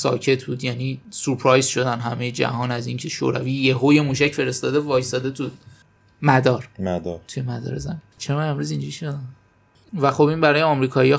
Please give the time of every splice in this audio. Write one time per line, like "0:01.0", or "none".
none